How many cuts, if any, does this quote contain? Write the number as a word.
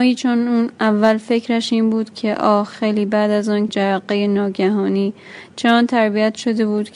one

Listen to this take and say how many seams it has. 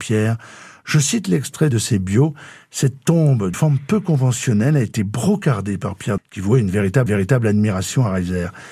four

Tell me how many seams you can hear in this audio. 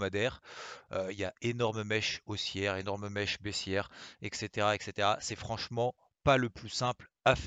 zero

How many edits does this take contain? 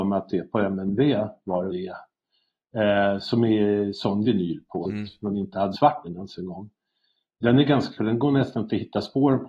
six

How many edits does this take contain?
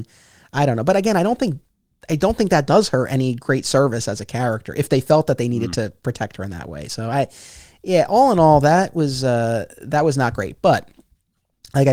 zero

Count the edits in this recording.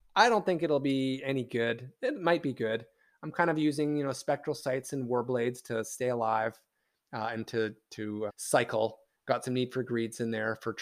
one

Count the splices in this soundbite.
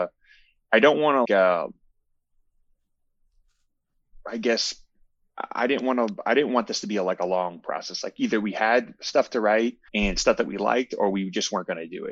two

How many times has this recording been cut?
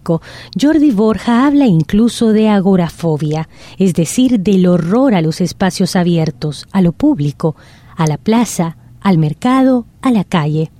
zero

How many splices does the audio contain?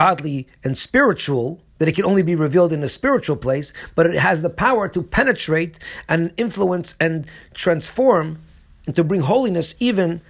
one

